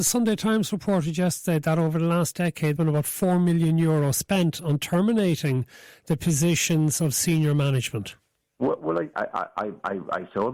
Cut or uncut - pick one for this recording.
cut